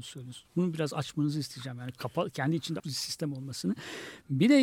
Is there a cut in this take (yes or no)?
yes